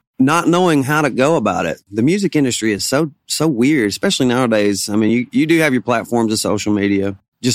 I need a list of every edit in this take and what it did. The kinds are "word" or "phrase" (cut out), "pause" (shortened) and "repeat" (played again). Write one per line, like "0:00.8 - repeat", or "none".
none

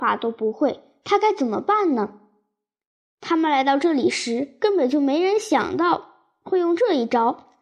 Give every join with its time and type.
none

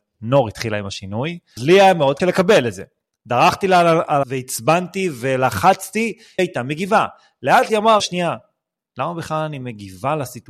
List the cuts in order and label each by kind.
0:01.6 - word
0:02.2 - word
0:04.2 - word
0:06.4 - word
0:07.7 - word
0:08.0 - word

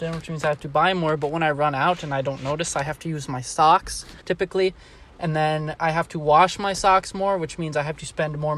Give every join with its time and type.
0:04.2 - pause

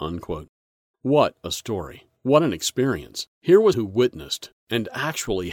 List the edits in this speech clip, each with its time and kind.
0:02.2 - pause
0:03.3 - pause
0:03.7 - word

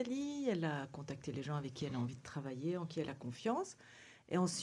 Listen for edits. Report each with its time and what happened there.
none

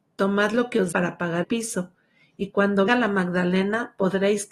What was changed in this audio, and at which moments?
0:00.9 - word
0:01.4 - word
0:02.9 - word

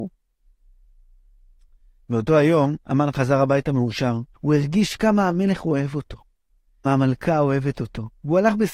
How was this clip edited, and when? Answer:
0:02.8 - pause
0:04.3 - pause
0:06.8 - word

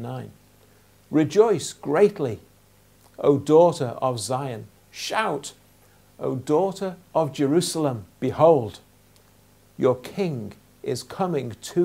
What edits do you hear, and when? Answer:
0:08.1 - pause

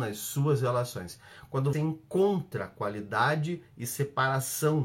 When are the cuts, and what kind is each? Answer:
0:01.7 - word

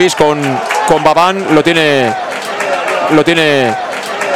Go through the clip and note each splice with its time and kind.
0:03.1 - repeat

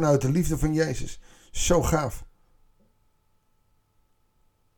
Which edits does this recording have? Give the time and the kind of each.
none

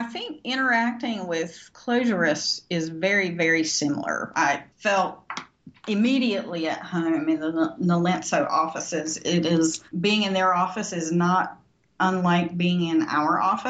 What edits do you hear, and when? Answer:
0:04.7 - pause
0:09.9 - pause

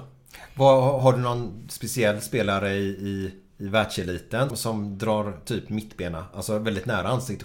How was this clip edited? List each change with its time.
0:04.5 - word

